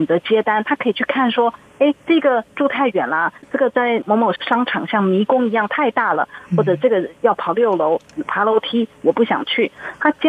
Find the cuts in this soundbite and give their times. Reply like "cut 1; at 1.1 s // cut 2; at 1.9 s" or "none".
cut 1; at 2.0 s